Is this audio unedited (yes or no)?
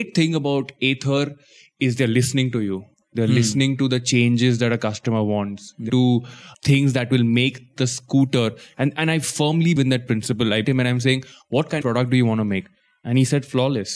no